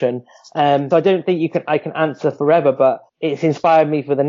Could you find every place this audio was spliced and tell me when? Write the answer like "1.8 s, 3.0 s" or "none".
0.9 s, 3.1 s

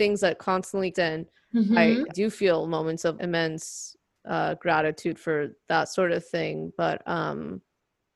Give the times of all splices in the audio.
0.9 s, 2.1 s, 3.1 s, 5.7 s

